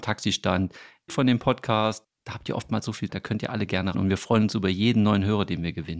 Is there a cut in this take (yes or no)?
yes